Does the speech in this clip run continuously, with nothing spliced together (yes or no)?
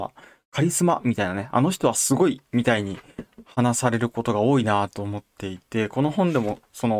yes